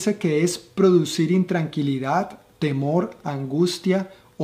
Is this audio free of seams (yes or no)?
yes